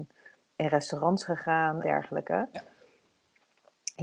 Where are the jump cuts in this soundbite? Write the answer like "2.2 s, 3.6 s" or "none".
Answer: 1.8 s

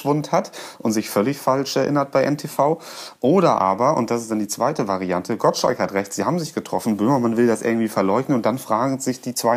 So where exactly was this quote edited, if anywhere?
none

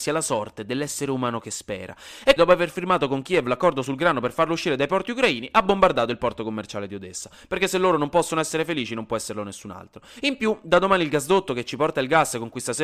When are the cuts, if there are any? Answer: 2.4 s

